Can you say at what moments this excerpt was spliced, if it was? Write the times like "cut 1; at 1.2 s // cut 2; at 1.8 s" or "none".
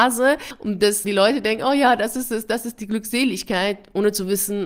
cut 1; at 1.0 s

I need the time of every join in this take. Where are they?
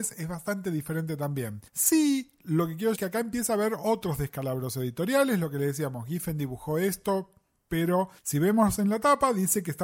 cut 1; at 1.7 s // cut 2; at 3.0 s // cut 3; at 8.2 s

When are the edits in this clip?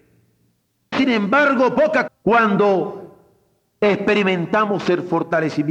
cut 1; at 0.9 s // cut 2; at 2.1 s

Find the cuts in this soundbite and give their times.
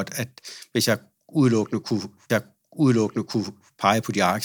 cut 1; at 2.3 s

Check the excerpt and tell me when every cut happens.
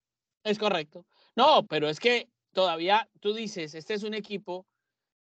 cut 1; at 1.7 s

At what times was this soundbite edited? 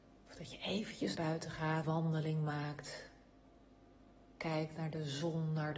cut 1; at 1.2 s // cut 2; at 1.8 s

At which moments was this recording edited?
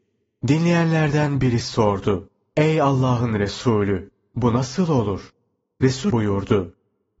cut 1; at 6.1 s

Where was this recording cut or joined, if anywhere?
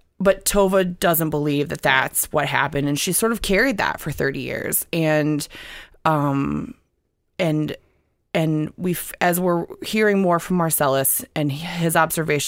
none

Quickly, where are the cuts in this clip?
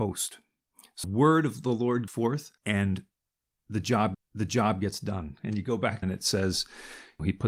cut 1; at 1.0 s // cut 2; at 2.1 s // cut 3; at 2.6 s // cut 4; at 4.1 s // cut 5; at 6.0 s

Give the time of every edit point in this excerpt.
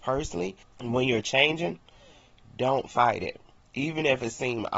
none

